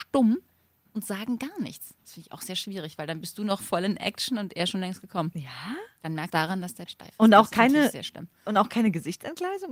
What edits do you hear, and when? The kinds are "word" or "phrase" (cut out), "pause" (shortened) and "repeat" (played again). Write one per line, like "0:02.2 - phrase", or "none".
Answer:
0:06.3 - phrase
0:06.9 - phrase